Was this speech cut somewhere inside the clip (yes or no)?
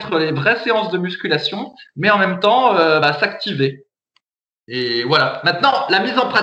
no